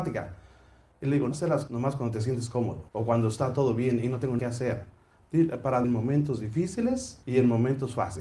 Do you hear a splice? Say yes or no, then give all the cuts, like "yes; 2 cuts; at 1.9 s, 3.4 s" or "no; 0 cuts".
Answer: yes; 6 cuts; at 1.3 s, 1.7 s, 2.9 s, 4.4 s, 5.8 s, 7.2 s